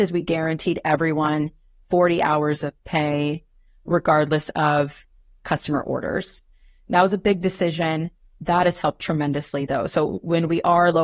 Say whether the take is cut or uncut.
uncut